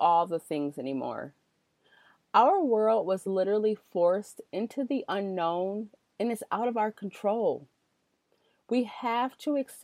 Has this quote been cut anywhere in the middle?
no; 0 cuts

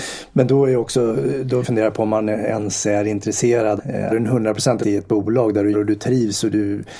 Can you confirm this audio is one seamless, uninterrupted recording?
no; 5 cuts; at 1.6 s, 3.8 s, 4.1 s, 4.8 s, 5.7 s

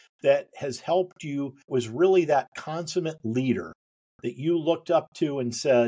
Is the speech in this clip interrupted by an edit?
yes; 1 cut; at 1.7 s

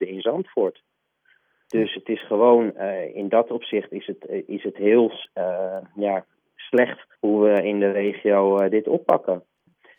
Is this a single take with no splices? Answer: no; 1 cut; at 7.2 s

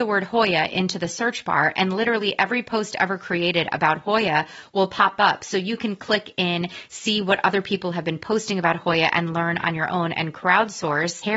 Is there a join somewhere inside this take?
no; 0 cuts

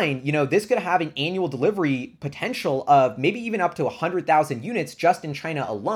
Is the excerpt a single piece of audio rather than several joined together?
yes; 0 cuts

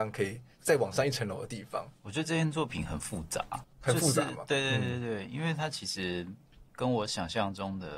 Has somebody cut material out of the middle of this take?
yes; 3 cuts; at 2.0 s, 3.7 s, 6.7 s

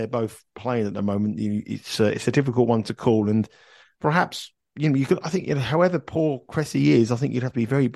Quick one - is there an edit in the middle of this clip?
no; 0 cuts

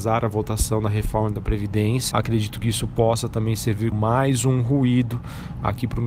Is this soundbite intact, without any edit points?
no; 2 cuts; at 2.1 s, 3.9 s

